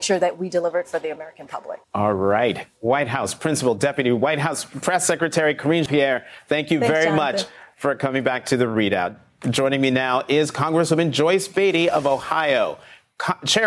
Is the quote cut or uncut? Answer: cut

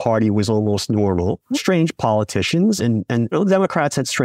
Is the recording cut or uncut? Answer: cut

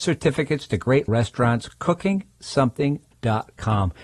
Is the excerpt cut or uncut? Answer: cut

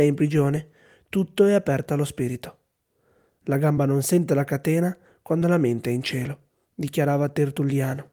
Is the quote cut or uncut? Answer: uncut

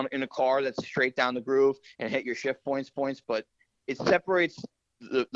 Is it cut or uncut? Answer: cut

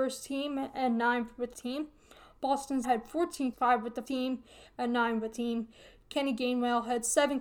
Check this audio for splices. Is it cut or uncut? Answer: cut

